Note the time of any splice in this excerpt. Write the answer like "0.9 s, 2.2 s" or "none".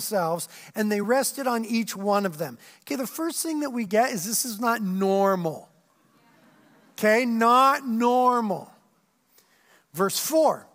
none